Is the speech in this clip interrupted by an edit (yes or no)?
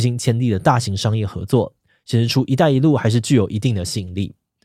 no